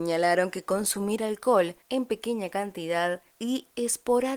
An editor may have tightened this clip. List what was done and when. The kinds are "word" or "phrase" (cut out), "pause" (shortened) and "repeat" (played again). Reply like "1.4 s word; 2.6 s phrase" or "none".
1.8 s pause; 3.3 s pause